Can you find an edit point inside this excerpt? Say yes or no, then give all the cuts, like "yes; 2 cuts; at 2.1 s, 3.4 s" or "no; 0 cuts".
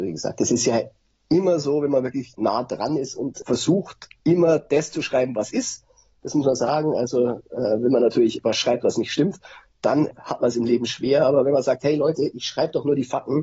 no; 0 cuts